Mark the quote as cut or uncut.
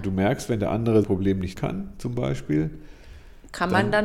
cut